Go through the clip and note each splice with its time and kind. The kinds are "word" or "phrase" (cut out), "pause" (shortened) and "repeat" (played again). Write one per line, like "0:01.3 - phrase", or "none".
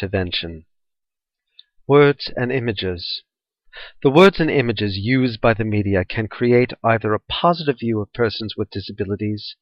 none